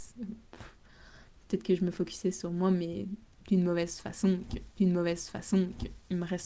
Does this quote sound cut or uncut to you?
cut